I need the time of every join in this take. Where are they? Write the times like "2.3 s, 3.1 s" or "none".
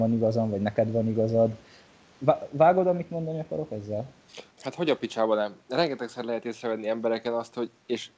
4.5 s